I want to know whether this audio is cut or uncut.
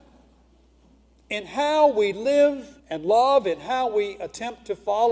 cut